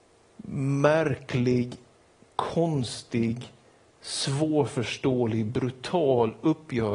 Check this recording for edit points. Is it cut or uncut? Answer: uncut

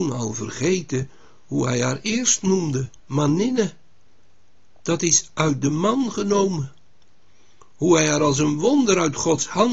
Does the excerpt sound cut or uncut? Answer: cut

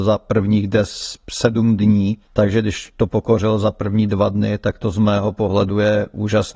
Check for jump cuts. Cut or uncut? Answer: cut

